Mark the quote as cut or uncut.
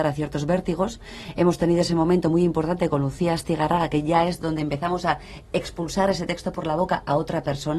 uncut